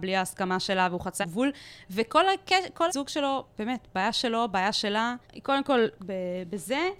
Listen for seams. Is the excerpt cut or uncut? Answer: cut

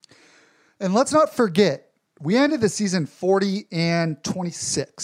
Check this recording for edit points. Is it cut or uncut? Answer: uncut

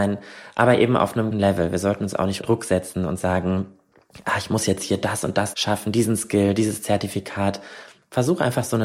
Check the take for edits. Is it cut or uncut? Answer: cut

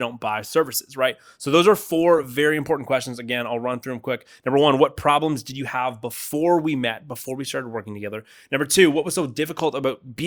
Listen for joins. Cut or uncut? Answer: uncut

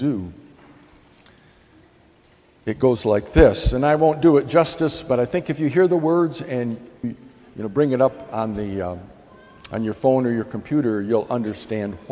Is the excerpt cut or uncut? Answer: cut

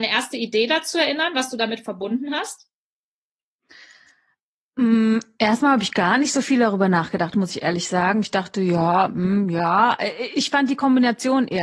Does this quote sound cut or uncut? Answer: uncut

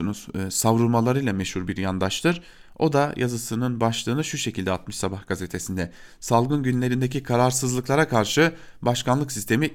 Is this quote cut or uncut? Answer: uncut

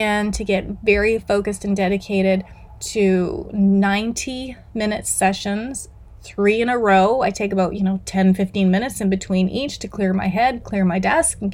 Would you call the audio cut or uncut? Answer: uncut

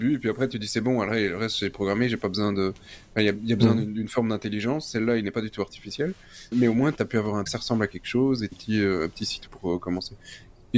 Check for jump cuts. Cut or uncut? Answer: cut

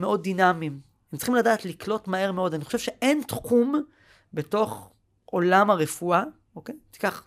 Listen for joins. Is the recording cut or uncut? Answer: uncut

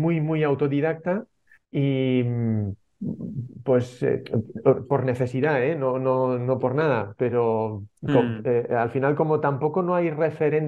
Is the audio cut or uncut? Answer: cut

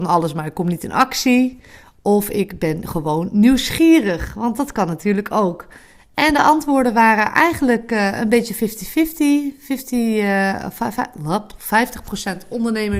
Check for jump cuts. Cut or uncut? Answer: uncut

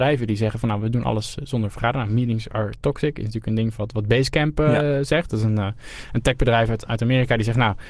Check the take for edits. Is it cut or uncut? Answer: uncut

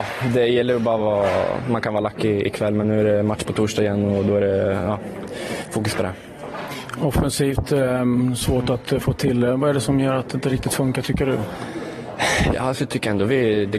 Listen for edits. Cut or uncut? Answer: uncut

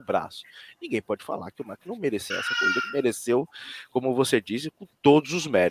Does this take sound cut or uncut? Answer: cut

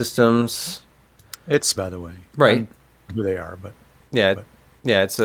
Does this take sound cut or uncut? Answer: cut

